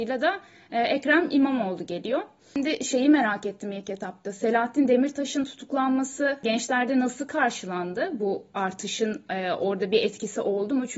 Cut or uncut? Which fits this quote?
uncut